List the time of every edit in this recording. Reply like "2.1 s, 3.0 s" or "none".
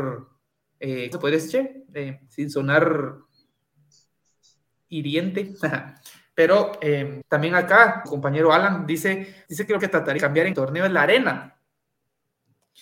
1.1 s, 2.3 s, 7.2 s, 8.0 s, 9.5 s, 9.8 s, 10.2 s, 10.5 s